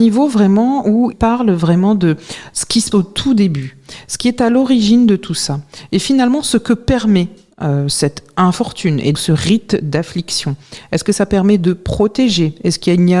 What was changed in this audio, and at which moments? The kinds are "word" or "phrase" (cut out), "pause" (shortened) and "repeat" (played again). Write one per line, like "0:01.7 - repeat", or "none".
0:01.1 - word
0:02.9 - word
0:09.1 - word

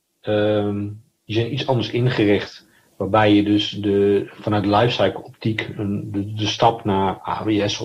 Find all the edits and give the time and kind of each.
0:02.8 - pause

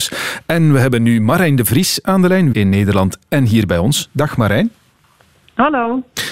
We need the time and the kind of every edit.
0:02.5 - word

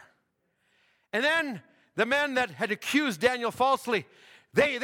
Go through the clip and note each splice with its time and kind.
none

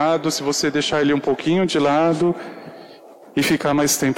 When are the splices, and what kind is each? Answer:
none

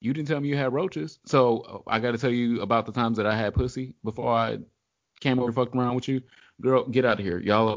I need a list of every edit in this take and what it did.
0:05.5 - word

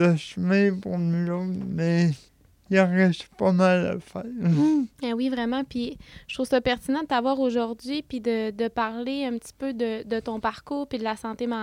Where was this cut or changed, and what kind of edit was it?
0:02.3 - pause
0:04.9 - pause

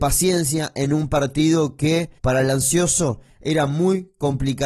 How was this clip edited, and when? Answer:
0:02.2 - pause

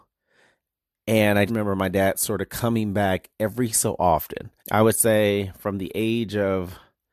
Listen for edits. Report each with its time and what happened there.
0:01.5 - word
0:04.6 - pause

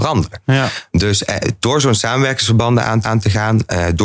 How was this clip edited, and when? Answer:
0:03.0 - repeat

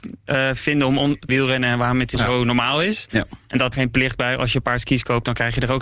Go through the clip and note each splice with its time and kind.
0:01.3 - phrase
0:02.1 - phrase
0:03.7 - word

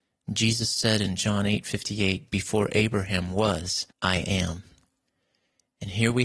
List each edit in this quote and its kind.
0:03.9 - pause

